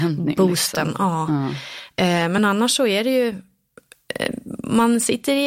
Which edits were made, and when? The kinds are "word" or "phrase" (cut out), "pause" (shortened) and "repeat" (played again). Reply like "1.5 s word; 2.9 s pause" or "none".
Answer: none